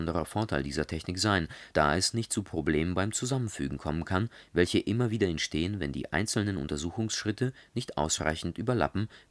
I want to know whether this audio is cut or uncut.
uncut